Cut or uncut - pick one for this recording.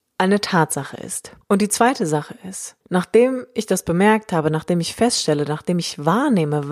cut